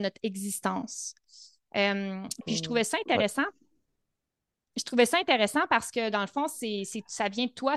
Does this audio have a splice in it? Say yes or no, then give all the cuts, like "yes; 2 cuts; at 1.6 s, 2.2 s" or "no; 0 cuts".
no; 0 cuts